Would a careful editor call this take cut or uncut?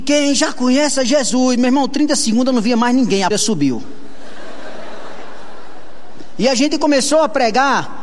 cut